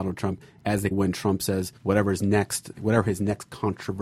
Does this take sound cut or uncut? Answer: cut